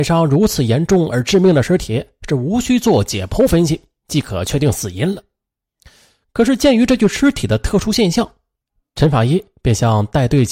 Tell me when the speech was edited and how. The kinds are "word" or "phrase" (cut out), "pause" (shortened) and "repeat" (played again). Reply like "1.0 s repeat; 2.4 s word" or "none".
none